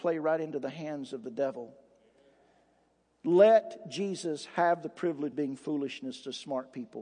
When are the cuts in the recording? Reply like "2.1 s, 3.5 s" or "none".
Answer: 5.3 s

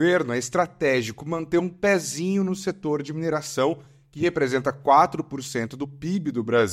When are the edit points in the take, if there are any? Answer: none

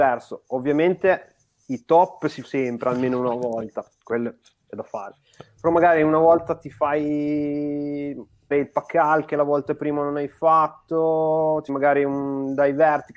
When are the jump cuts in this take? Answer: 2.4 s, 8.5 s, 11.7 s

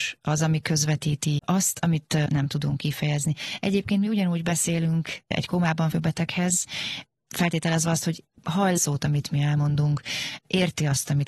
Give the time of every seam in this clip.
1.4 s, 2.3 s, 5.9 s, 8.4 s, 8.8 s

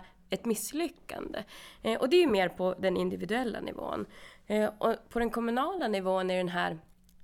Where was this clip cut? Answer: none

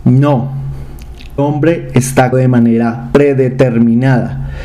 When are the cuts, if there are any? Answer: 1.4 s, 2.3 s

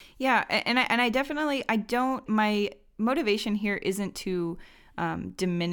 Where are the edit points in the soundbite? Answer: 2.3 s

